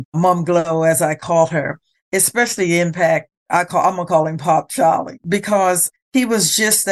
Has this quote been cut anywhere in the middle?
no; 0 cuts

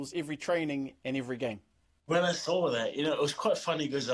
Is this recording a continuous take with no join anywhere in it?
yes; 0 cuts

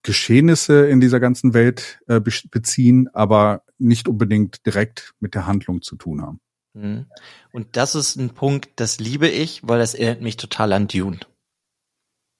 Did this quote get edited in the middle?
no; 0 cuts

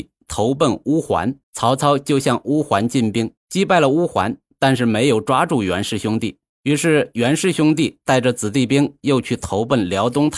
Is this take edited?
yes; 3 cuts; at 1.4 s, 3.4 s, 6.5 s

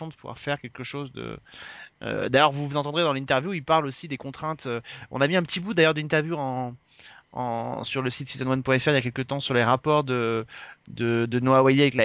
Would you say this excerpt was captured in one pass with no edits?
yes; 0 cuts

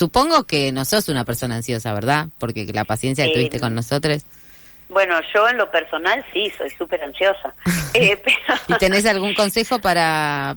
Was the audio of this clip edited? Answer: no; 0 cuts

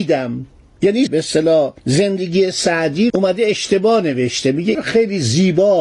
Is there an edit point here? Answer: yes; 4 cuts; at 1.1 s, 1.8 s, 3.1 s, 4.7 s

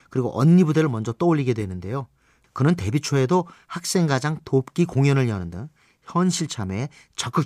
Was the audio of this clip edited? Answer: no; 0 cuts

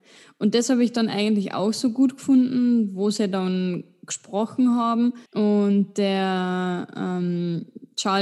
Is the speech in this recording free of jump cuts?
no; 1 cut; at 5.3 s

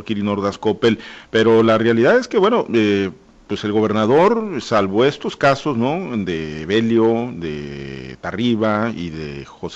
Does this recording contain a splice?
no; 0 cuts

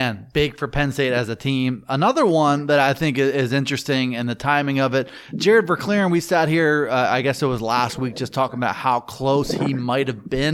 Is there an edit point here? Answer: no; 0 cuts

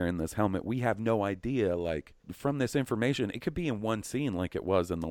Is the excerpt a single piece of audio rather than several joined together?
no; 1 cut; at 2.2 s

